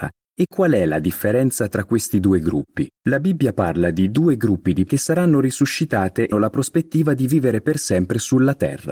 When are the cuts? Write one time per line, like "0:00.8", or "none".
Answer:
0:03.0
0:04.9
0:06.3